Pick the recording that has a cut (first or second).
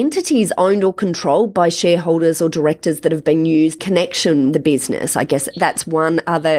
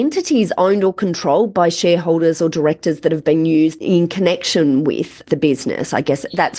first